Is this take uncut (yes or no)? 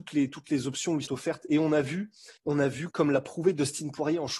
no